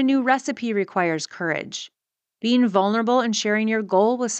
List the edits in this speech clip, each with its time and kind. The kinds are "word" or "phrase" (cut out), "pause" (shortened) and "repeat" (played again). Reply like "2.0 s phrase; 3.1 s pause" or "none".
none